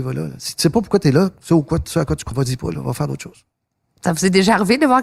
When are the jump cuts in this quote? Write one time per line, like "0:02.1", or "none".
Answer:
0:02.3